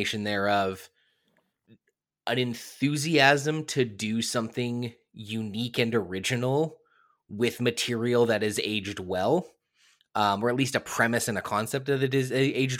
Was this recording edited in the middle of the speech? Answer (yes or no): no